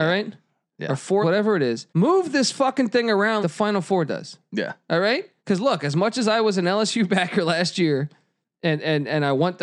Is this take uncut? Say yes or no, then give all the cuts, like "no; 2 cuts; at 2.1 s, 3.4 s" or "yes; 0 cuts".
no; 4 cuts; at 1.2 s, 1.9 s, 3.4 s, 5.4 s